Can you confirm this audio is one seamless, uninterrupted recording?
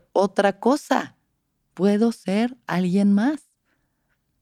yes; 0 cuts

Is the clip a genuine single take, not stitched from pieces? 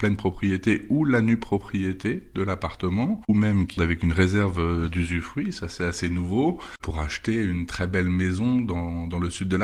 no; 1 cut; at 3.8 s

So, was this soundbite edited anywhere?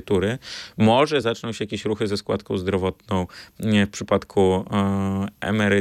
no; 0 cuts

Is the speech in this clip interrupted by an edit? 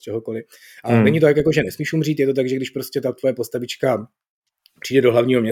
no; 0 cuts

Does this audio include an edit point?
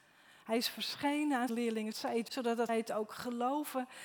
yes; 4 cuts; at 1.5 s, 1.9 s, 2.3 s, 2.7 s

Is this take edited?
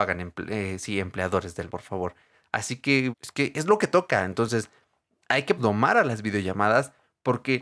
yes; 3 cuts; at 1.7 s, 3.1 s, 5.6 s

